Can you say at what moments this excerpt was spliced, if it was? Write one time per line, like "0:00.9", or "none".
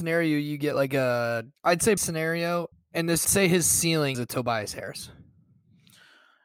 0:01.5
0:02.0
0:02.7
0:03.2
0:04.1